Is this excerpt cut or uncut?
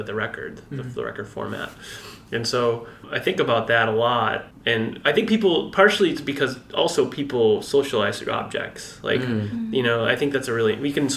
uncut